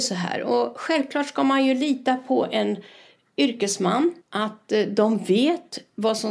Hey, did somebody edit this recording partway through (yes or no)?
yes